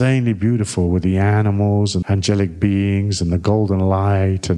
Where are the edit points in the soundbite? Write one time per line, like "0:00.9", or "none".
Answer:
0:02.0